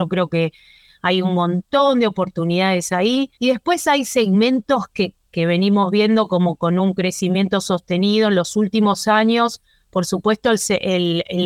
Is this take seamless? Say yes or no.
no